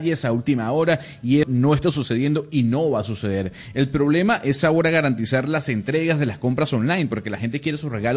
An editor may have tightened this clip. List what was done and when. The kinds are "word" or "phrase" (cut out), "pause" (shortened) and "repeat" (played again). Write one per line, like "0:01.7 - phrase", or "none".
0:01.4 - word